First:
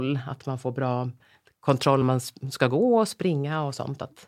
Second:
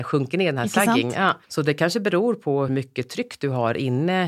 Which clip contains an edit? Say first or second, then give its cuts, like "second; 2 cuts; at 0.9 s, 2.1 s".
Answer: second; 2 cuts; at 1.4 s, 2.7 s